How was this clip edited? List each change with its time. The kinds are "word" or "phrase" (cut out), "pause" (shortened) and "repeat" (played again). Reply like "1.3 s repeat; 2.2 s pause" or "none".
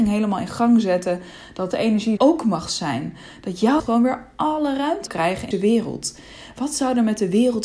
1.7 s word; 2.2 s word; 3.8 s word; 5.1 s word; 5.5 s word